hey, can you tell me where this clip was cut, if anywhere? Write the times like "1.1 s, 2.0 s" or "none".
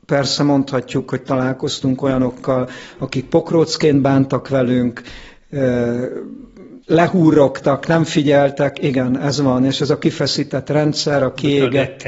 6.8 s